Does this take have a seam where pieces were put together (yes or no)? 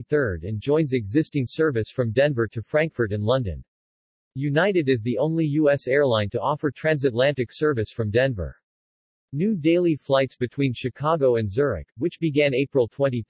no